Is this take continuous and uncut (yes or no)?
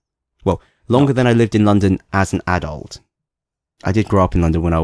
yes